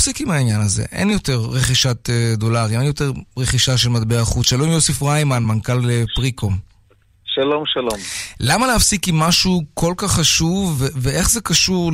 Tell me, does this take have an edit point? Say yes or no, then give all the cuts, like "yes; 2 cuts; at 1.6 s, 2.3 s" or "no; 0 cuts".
no; 0 cuts